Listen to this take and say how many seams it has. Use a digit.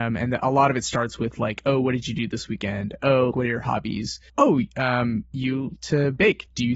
3